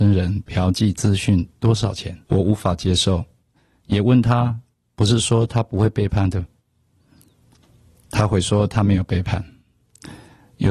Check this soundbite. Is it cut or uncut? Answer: cut